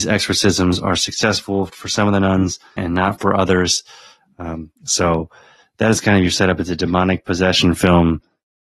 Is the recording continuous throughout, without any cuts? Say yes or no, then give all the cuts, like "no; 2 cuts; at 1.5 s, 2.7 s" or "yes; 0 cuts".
no; 2 cuts; at 2.8 s, 4.8 s